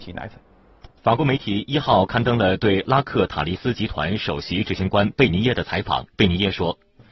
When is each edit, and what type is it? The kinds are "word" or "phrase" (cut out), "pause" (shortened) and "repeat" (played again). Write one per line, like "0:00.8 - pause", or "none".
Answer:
0:01.0 - pause
0:06.1 - pause

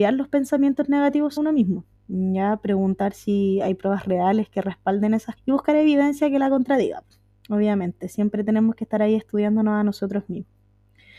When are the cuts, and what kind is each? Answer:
0:01.4 - word
0:05.4 - word

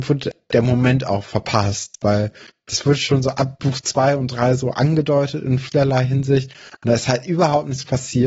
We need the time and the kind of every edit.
none

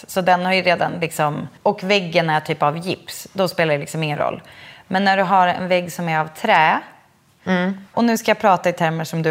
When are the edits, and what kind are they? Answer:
0:01.6 - pause
0:07.9 - pause

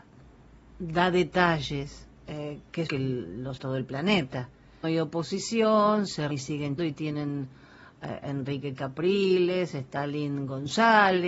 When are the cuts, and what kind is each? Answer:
0:02.2 - pause
0:02.9 - word
0:03.6 - word
0:04.8 - phrase
0:06.3 - word
0:06.8 - word

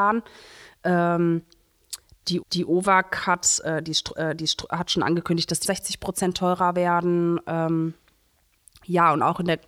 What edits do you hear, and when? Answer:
0:02.4 - repeat
0:04.2 - repeat
0:05.6 - word

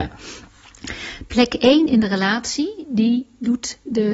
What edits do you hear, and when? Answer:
none

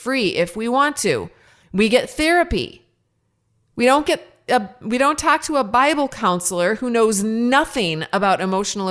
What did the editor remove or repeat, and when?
none

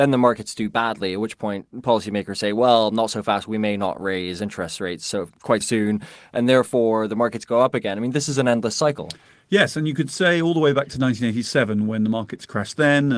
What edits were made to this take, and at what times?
0:05.6 - word

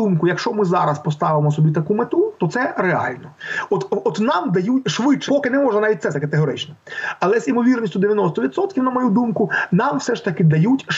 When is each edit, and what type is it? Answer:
0:05.3 - phrase
0:06.1 - word

